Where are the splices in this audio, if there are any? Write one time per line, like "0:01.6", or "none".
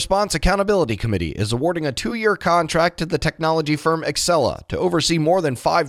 none